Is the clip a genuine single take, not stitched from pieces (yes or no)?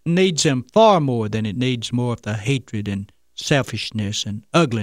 yes